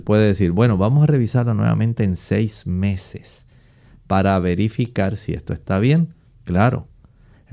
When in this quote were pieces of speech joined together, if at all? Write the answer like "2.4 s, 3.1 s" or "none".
none